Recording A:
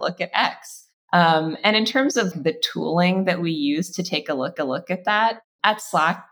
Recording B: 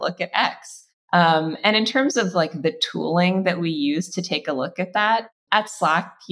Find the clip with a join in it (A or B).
A